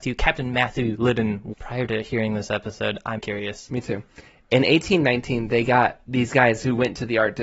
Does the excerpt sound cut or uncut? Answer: cut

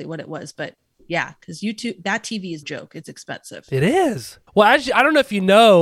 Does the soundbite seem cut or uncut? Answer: cut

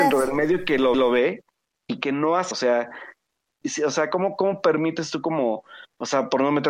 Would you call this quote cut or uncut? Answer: cut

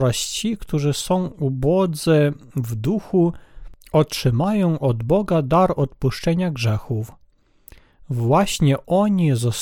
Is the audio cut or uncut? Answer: uncut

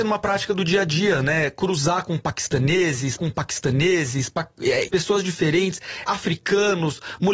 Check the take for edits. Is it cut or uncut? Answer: cut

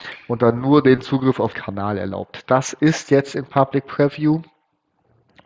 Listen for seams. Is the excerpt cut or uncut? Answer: cut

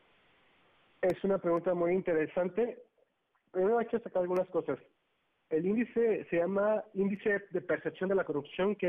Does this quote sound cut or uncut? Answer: uncut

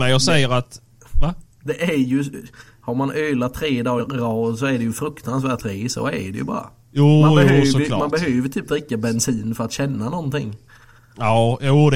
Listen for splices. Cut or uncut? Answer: cut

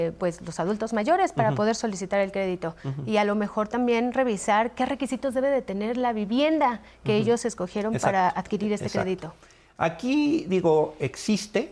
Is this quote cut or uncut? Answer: uncut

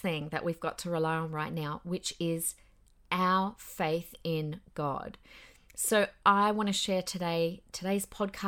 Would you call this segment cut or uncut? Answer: uncut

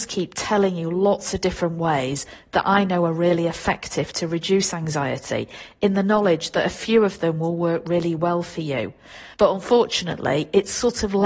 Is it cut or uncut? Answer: cut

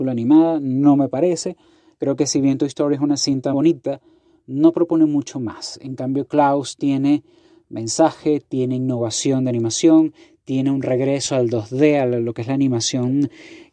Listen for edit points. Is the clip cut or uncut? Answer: cut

